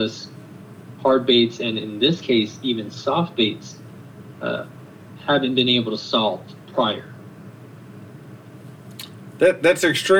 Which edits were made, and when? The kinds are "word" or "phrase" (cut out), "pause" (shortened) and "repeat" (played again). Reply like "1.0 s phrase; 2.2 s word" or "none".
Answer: 6.6 s pause